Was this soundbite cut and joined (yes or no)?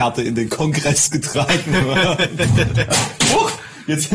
no